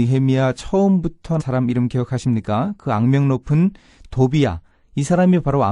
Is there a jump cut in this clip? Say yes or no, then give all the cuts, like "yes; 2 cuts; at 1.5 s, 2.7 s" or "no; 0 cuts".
yes; 1 cut; at 1.4 s